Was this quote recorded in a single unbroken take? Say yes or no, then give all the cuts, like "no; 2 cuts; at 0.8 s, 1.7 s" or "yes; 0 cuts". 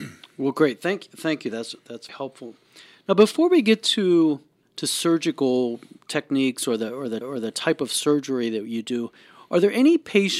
no; 3 cuts; at 2.1 s, 4.6 s, 7.2 s